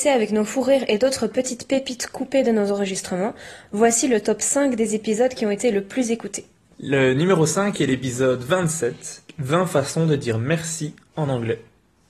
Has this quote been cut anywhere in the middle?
no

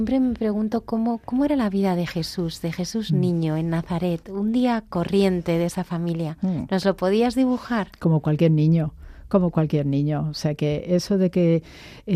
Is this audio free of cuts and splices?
yes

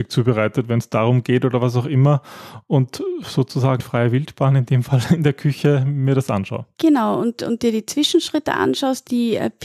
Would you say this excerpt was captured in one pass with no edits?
no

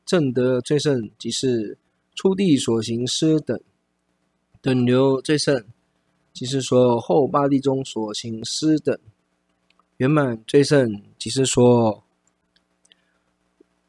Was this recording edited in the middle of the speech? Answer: no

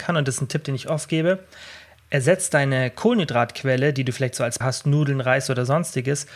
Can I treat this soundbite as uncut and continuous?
no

